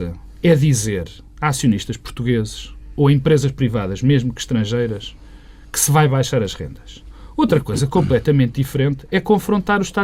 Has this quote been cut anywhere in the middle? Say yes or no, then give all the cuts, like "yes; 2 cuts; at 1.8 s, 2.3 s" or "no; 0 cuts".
no; 0 cuts